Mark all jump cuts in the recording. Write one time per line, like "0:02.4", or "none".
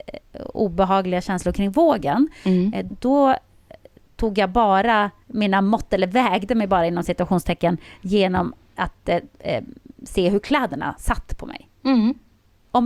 0:02.9
0:05.2